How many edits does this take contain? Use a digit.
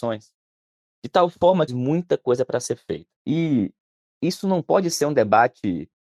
2